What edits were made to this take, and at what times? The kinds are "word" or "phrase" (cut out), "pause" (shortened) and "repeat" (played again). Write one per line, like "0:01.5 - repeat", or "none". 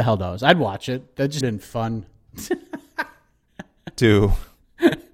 0:01.4 - word